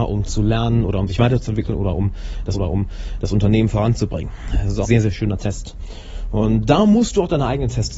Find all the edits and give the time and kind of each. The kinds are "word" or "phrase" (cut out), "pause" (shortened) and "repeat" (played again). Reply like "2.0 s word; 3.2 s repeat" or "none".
2.5 s repeat; 4.8 s word